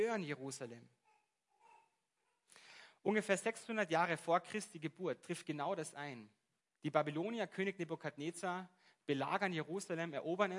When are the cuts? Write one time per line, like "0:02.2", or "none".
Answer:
0:06.6

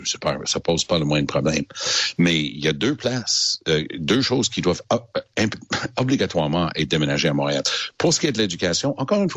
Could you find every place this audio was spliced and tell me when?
none

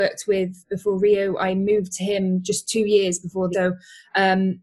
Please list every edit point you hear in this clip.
0:03.5

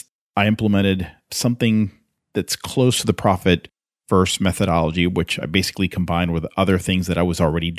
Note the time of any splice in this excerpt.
none

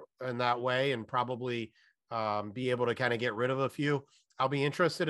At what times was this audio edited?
none

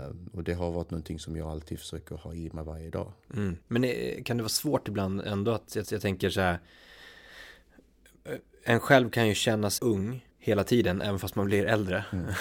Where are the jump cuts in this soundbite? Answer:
0:03.6
0:05.8
0:09.8
0:10.3

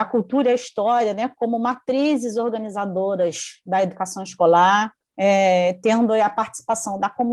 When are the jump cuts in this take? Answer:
0:05.0

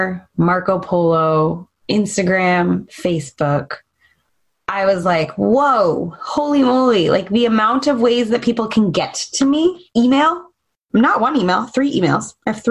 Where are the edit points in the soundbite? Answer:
none

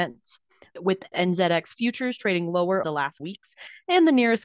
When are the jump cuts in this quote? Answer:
0:01.1
0:02.8
0:03.2

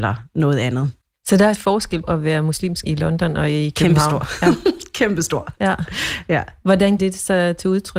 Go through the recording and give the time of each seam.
0:01.0
0:01.5
0:02.0
0:02.8
0:07.0

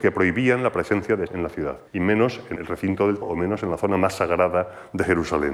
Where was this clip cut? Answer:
0:01.3
0:01.9
0:02.6
0:03.2

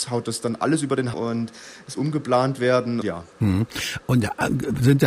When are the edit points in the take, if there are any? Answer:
0:01.1
0:02.0
0:03.0

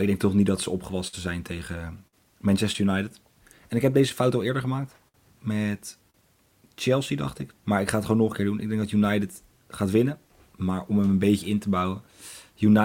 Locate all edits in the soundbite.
0:07.6

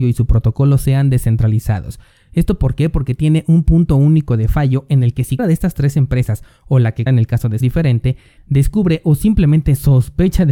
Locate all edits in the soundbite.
0:05.4
0:07.1
0:07.6

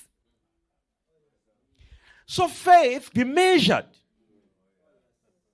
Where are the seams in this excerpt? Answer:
0:03.1

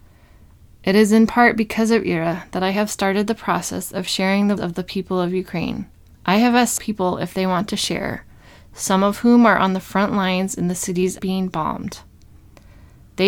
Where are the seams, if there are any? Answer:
0:04.6
0:06.1
0:06.8
0:11.2

